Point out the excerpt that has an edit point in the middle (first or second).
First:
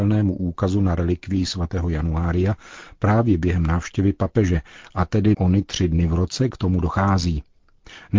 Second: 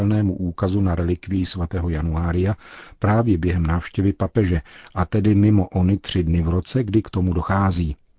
first